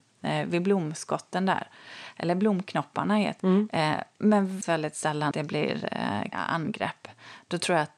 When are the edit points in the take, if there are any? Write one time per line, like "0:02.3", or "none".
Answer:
0:03.4
0:04.6
0:05.3
0:06.3